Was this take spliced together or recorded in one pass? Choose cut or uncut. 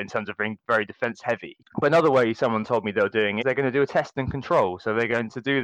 cut